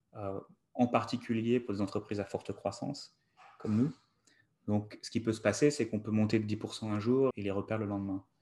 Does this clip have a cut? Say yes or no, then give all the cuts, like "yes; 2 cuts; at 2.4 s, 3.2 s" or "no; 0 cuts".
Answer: yes; 1 cut; at 7.3 s